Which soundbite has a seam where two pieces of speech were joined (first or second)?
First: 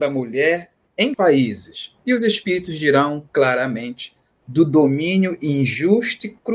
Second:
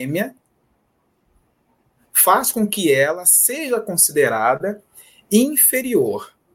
first